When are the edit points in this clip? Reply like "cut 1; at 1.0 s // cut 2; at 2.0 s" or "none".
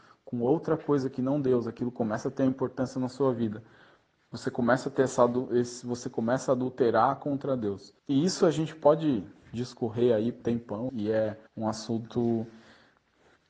cut 1; at 8.0 s // cut 2; at 10.4 s // cut 3; at 10.9 s // cut 4; at 11.5 s